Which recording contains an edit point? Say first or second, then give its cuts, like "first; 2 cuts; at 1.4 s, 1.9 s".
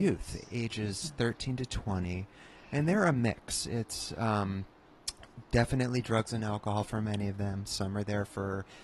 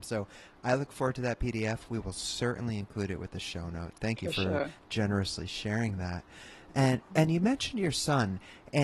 second; 1 cut; at 3.9 s